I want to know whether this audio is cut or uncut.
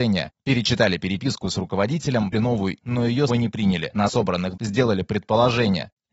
cut